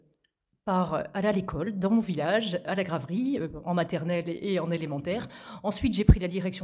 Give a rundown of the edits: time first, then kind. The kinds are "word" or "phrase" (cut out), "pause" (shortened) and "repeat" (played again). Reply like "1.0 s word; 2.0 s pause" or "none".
none